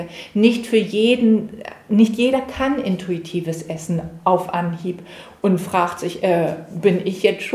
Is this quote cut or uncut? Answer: uncut